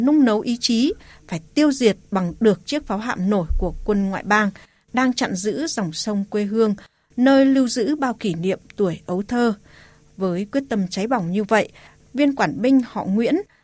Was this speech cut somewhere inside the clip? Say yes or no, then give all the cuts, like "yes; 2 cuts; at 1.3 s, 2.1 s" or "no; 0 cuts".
no; 0 cuts